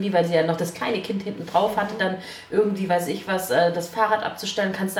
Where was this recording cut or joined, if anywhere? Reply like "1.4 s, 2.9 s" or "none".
none